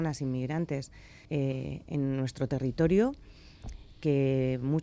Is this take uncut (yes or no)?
no